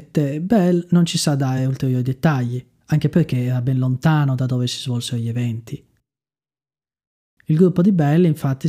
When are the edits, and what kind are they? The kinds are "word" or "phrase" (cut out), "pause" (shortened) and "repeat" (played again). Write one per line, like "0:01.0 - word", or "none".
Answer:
none